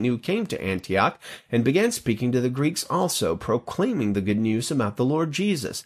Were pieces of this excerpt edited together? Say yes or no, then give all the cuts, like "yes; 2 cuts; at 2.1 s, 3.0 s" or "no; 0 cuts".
no; 0 cuts